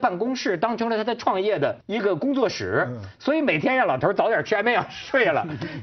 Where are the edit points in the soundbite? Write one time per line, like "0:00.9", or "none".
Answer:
0:01.8